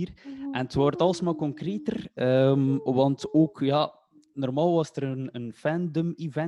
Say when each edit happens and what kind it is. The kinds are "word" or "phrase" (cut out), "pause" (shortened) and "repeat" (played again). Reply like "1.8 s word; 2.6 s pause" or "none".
none